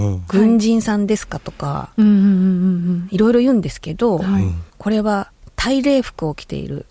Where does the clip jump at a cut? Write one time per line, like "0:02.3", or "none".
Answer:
0:04.7